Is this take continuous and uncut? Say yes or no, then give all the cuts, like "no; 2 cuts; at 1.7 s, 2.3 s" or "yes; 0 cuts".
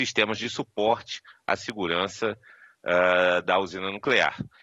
yes; 0 cuts